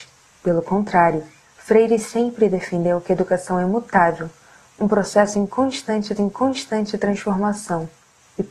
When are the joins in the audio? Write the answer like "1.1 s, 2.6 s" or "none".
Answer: 6.2 s

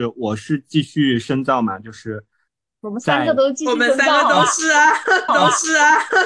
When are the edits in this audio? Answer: 5.3 s

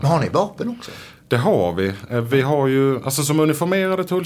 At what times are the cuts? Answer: none

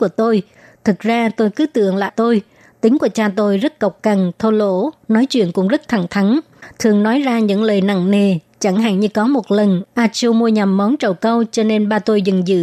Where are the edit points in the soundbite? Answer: 2.1 s

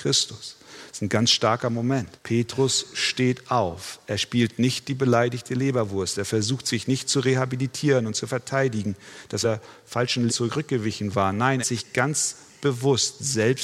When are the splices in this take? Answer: 2.2 s, 9.4 s, 10.3 s, 11.6 s

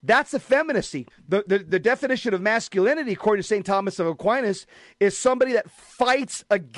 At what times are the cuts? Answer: 1.1 s

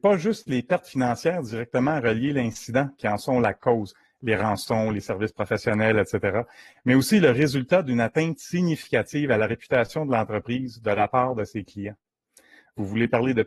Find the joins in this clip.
none

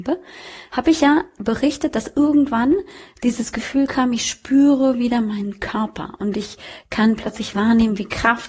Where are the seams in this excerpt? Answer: none

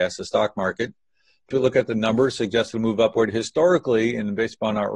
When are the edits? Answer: 1.5 s

